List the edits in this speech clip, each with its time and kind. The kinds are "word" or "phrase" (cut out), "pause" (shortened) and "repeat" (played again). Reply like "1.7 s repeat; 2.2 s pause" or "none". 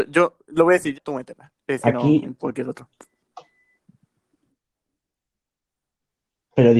0.9 s word; 1.8 s phrase; 2.2 s phrase